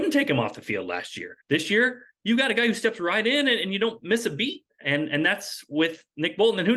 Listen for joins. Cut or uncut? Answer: cut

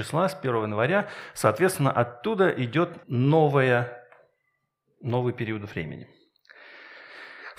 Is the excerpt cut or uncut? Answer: cut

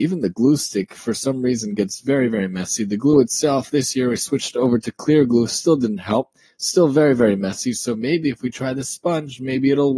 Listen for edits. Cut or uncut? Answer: uncut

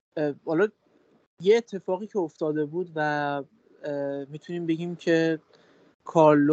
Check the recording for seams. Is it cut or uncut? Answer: uncut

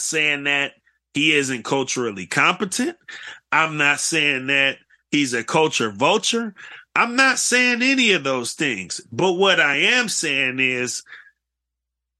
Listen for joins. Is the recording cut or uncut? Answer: uncut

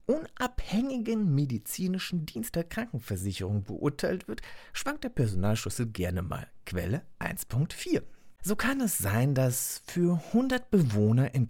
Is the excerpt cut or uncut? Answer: cut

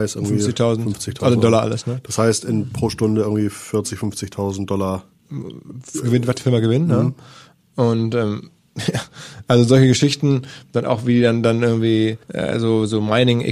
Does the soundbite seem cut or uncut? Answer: cut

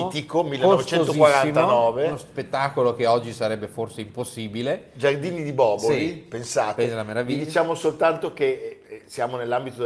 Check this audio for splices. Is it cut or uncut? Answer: uncut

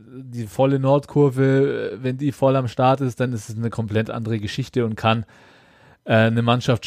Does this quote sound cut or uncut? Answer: uncut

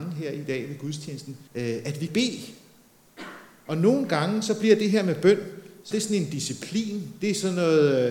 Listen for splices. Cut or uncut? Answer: cut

